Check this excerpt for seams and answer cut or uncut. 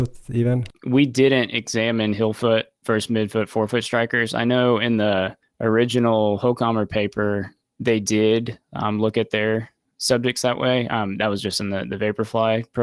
cut